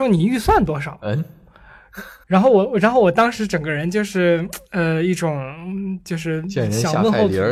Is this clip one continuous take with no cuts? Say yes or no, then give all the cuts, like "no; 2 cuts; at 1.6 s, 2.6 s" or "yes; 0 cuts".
no; 1 cut; at 2.2 s